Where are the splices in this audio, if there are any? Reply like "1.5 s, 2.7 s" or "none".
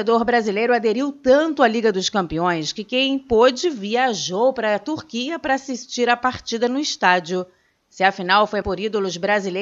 8.6 s